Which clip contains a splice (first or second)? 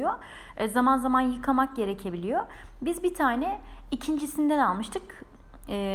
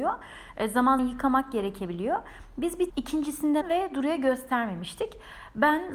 second